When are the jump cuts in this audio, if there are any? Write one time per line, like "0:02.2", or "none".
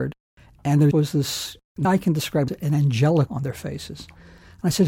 0:00.9
0:01.8
0:02.5
0:03.3

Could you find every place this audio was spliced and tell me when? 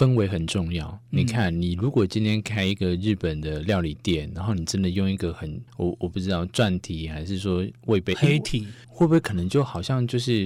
0:05.7
0:08.8

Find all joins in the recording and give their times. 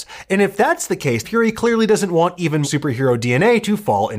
0:01.2
0:02.6

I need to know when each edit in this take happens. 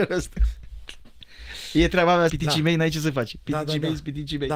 0:02.3

